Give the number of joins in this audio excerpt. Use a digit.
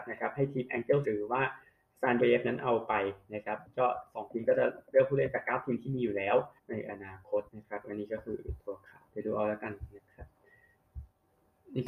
5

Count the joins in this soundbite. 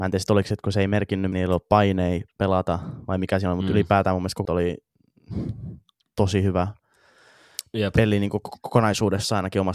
2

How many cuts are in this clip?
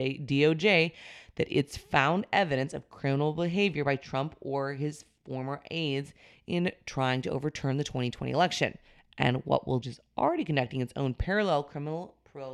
1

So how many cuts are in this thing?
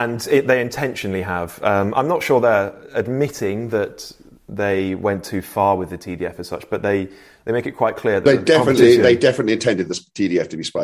0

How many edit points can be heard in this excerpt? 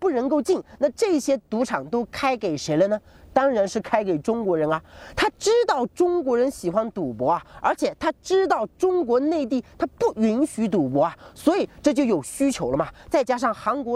0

